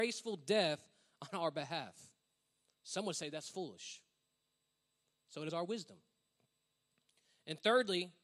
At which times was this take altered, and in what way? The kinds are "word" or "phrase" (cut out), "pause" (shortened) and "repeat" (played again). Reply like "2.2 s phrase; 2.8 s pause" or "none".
5.5 s word